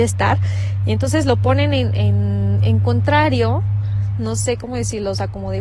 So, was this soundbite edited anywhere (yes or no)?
no